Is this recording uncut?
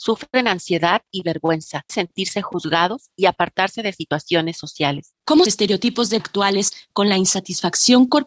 no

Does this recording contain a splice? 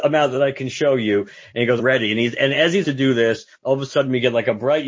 yes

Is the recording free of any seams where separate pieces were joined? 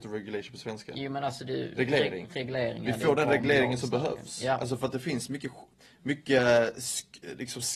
yes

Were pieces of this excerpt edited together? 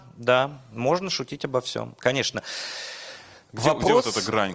no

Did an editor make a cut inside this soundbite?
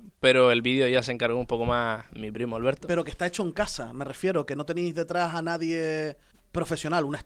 yes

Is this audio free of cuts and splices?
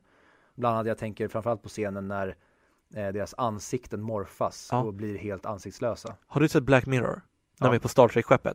yes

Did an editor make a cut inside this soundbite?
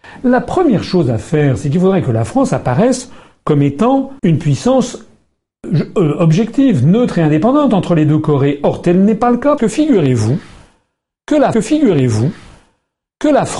yes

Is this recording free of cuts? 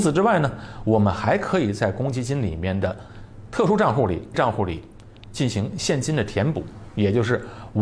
no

